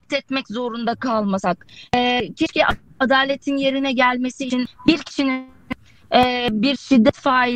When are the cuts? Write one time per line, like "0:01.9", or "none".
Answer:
none

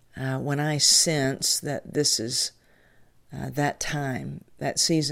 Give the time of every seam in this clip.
none

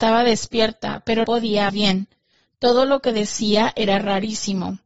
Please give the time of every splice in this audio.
0:01.2
0:01.7

